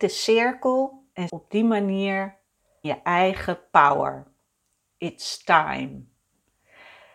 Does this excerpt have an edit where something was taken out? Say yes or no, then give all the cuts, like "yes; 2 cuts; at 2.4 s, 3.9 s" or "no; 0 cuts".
yes; 2 cuts; at 1.3 s, 2.8 s